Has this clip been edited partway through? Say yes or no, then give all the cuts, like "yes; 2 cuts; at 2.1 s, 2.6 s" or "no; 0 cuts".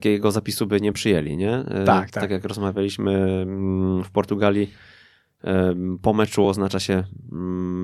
no; 0 cuts